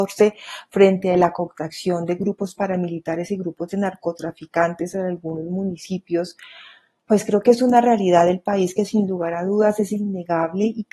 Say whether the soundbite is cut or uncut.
uncut